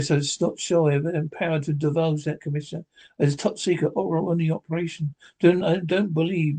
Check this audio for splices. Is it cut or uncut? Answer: uncut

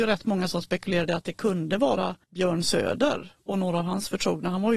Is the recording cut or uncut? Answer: cut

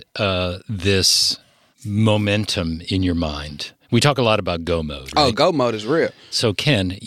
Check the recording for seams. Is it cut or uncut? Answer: uncut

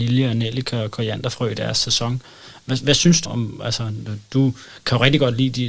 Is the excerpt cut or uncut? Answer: cut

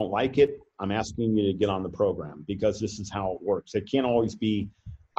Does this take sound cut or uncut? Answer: uncut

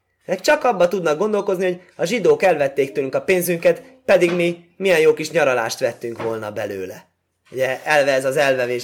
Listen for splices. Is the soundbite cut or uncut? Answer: uncut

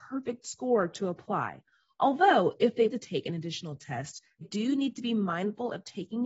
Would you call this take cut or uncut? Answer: cut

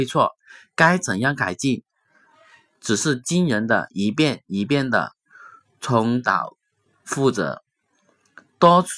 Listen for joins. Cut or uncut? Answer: uncut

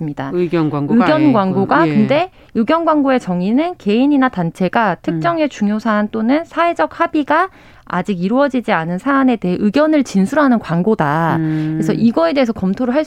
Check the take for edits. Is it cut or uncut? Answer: uncut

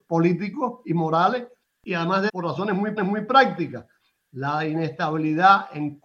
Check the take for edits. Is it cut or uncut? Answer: cut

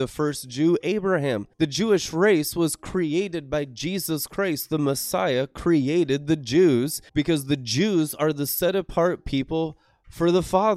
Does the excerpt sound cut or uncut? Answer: cut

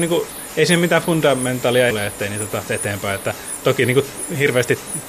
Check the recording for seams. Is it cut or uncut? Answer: cut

